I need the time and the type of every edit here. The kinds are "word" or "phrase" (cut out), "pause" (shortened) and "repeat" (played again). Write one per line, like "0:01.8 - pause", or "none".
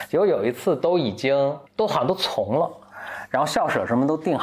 0:01.7 - pause